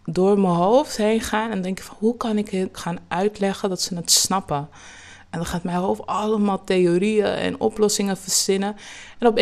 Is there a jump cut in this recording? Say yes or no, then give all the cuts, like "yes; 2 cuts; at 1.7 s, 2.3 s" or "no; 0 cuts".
yes; 1 cut; at 2.7 s